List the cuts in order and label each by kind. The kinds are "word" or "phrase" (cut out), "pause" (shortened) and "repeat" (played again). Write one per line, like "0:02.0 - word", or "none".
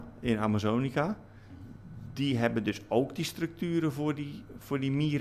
none